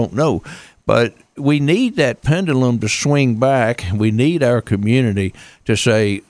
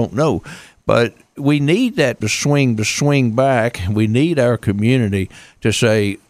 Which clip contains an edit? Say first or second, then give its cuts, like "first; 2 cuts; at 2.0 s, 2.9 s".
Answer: second; 2 cuts; at 2.2 s, 2.8 s